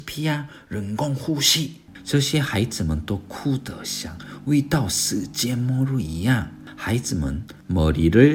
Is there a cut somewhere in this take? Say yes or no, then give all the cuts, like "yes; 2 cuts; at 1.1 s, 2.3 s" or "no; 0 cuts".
no; 0 cuts